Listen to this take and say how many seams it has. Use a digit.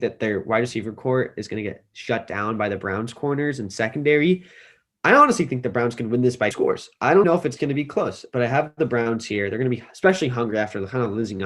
2